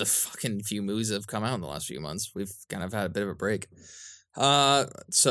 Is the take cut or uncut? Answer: uncut